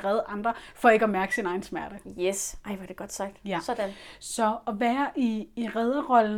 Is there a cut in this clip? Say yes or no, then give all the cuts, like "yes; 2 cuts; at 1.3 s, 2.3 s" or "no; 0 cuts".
no; 0 cuts